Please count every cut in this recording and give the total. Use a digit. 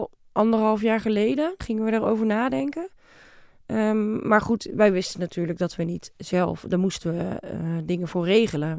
1